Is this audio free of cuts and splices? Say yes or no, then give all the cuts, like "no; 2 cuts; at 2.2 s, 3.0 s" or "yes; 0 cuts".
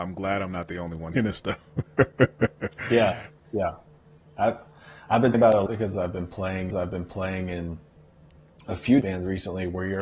no; 6 cuts; at 1.1 s, 3.4 s, 5.3 s, 5.7 s, 6.7 s, 9.0 s